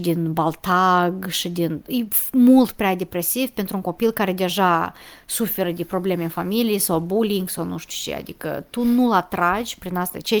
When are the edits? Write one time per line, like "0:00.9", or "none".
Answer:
none